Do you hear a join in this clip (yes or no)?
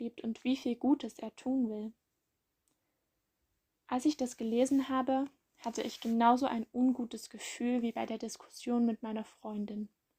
no